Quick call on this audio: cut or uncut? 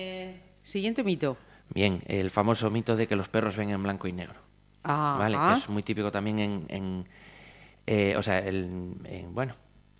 uncut